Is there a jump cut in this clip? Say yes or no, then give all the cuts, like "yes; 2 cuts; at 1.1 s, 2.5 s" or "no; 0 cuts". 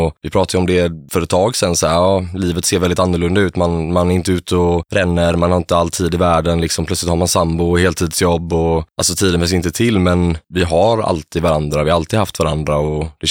no; 0 cuts